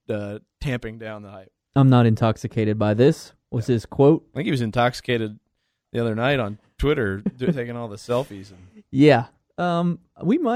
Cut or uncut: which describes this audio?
uncut